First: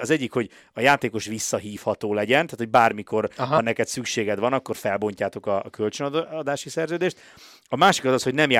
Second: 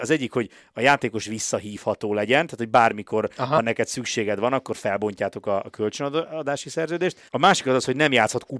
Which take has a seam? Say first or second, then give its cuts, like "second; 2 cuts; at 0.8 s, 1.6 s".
second; 1 cut; at 7.3 s